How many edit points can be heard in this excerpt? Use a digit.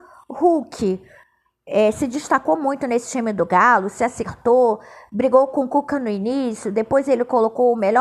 0